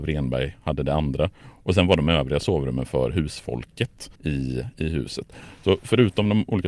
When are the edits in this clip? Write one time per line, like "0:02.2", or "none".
0:04.2

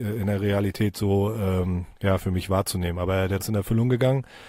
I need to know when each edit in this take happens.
0:02.0
0:03.4

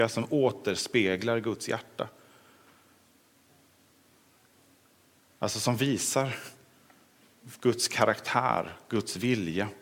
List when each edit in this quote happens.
none

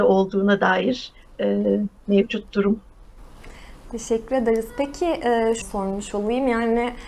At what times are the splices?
0:01.2
0:05.6

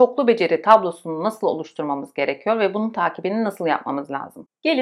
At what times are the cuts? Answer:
none

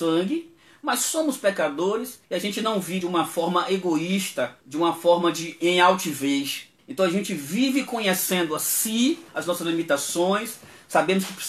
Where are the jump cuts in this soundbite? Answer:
0:02.2
0:03.0
0:04.6
0:05.6
0:06.8
0:09.3

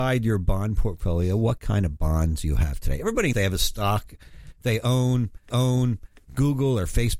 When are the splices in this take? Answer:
0:03.3
0:05.5

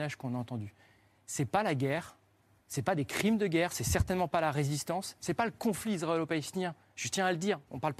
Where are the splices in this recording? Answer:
none

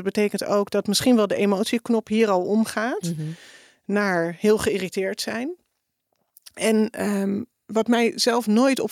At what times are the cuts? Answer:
none

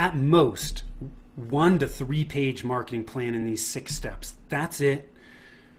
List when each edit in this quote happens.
none

